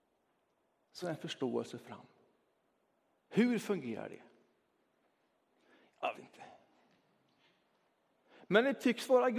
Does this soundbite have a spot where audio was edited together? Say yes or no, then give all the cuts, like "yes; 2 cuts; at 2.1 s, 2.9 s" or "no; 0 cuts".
yes; 2 cuts; at 1.0 s, 6.1 s